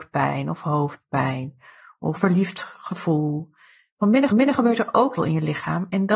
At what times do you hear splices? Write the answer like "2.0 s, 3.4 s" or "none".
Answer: 2.2 s, 4.3 s, 5.2 s

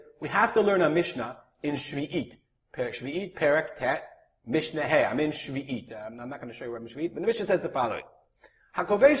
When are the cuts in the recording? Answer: none

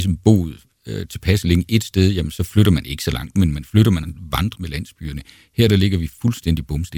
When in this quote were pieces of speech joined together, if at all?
3.3 s, 4.0 s, 4.6 s

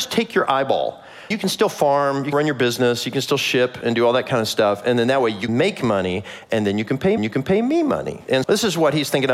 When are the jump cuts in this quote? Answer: 1.3 s, 2.3 s, 5.5 s, 7.2 s, 8.4 s

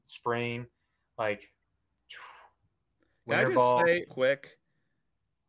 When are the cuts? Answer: 4.1 s

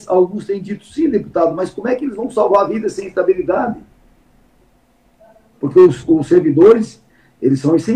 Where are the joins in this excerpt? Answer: none

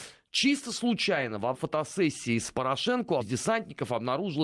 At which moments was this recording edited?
1.5 s, 3.2 s

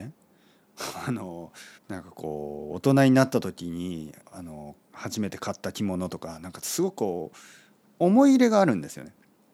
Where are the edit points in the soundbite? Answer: 1.8 s, 4.2 s, 4.8 s

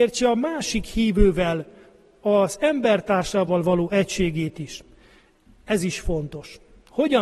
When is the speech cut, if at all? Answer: none

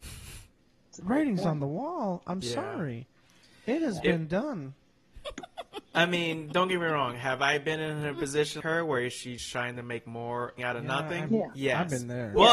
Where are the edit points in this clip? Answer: 2.4 s, 8.6 s, 10.6 s, 11.3 s

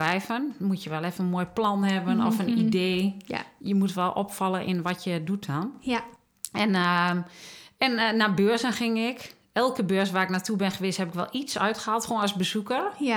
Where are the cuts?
none

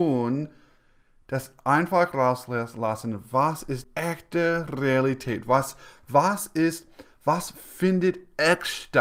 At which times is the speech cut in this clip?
3.8 s

